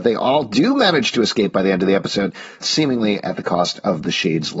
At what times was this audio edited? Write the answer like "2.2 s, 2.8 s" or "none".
2.6 s